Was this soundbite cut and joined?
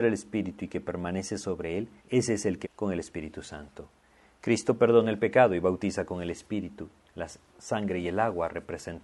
yes; 2 cuts; at 2.0 s, 2.6 s

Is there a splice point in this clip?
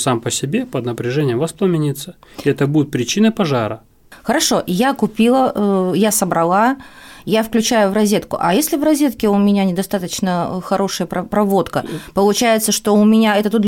no; 0 cuts

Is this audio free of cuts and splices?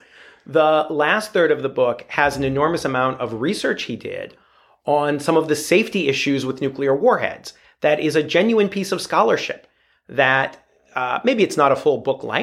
yes; 0 cuts

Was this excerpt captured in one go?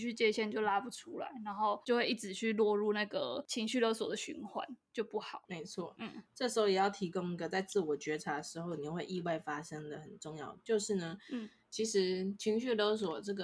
yes; 0 cuts

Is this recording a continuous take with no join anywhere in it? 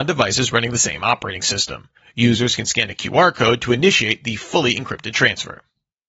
no; 1 cut; at 2.0 s

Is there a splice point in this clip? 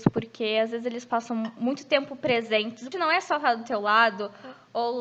yes; 1 cut; at 2.9 s

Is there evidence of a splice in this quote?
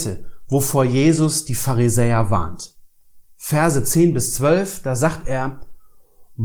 no; 0 cuts

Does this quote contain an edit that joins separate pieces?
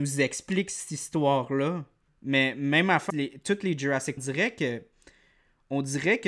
yes; 3 cuts; at 2.1 s, 3.1 s, 4.2 s

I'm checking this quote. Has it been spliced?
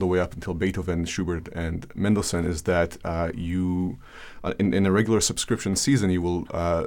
no; 0 cuts

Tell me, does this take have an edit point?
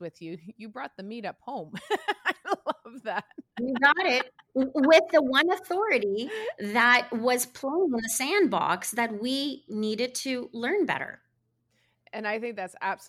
no; 0 cuts

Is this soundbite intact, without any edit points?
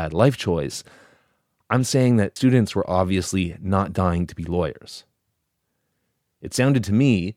no; 1 cut; at 2.4 s

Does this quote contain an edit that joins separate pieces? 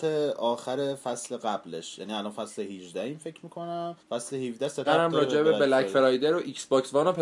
yes; 2 cuts; at 4.0 s, 4.8 s

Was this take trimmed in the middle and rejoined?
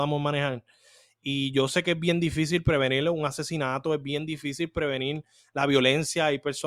no; 0 cuts

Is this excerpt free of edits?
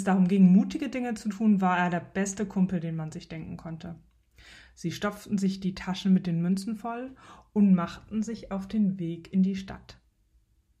yes; 0 cuts

